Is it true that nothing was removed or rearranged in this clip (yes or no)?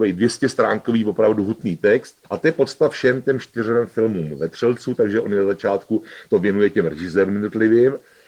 no